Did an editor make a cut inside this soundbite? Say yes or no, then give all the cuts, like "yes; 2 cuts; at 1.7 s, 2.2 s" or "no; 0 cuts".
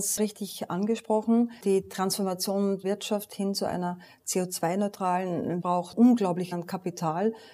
yes; 3 cuts; at 2.8 s, 5.6 s, 6.5 s